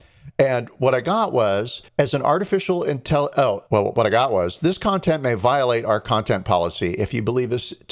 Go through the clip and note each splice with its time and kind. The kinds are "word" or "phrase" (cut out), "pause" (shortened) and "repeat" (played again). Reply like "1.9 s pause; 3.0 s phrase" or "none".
1.9 s pause; 3.7 s pause